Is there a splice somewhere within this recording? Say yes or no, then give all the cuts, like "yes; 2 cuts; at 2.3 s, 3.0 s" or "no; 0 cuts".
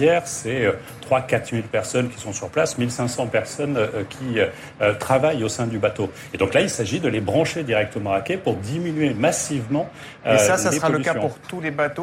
no; 0 cuts